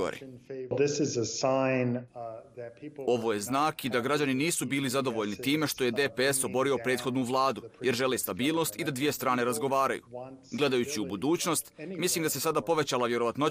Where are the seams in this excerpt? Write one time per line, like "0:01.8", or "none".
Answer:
none